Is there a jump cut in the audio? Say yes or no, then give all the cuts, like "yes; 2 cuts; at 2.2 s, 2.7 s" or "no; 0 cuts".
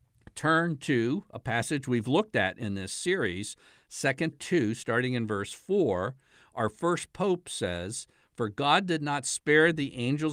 yes; 1 cut; at 4.3 s